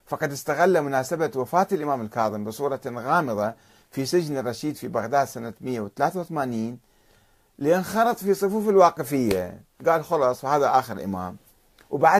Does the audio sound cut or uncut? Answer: uncut